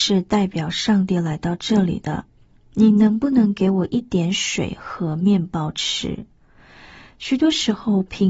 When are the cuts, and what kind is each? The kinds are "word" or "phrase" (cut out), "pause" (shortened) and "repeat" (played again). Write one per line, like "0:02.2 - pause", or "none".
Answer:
none

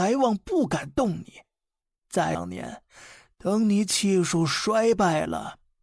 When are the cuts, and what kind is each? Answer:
none

